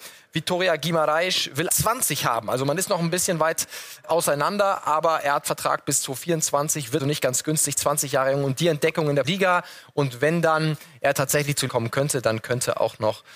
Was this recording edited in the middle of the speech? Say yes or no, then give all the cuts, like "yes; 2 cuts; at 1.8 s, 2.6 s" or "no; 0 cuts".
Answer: yes; 5 cuts; at 1.7 s, 4.0 s, 7.0 s, 9.2 s, 11.7 s